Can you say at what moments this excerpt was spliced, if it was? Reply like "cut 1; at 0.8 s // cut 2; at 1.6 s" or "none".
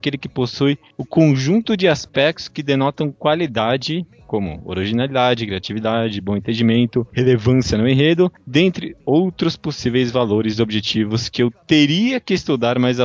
cut 1; at 11.6 s